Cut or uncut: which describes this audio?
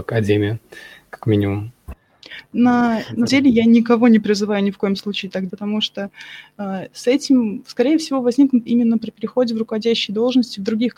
cut